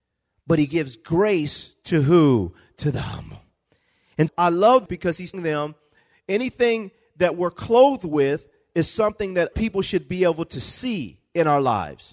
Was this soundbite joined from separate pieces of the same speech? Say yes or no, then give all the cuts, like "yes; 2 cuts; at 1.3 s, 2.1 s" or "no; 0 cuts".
yes; 4 cuts; at 4.3 s, 4.9 s, 5.3 s, 9.5 s